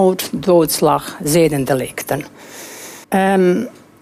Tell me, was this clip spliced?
yes; 1 cut; at 3.0 s

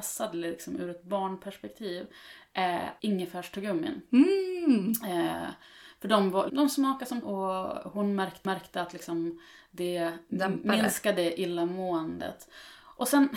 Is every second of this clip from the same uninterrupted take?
no; 4 cuts; at 3.0 s, 6.5 s, 7.2 s, 8.5 s

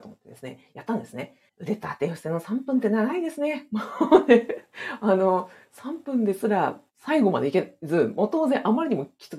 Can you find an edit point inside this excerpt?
yes; 1 cut; at 1.5 s

